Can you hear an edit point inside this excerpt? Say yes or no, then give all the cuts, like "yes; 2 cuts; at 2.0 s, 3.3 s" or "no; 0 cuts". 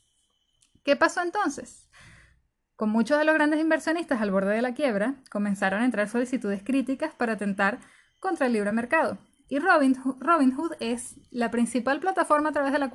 no; 0 cuts